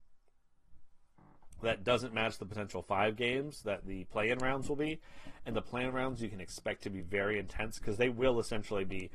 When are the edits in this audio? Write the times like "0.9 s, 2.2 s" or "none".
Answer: none